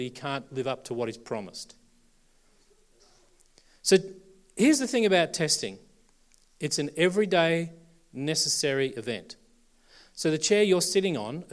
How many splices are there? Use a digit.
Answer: 0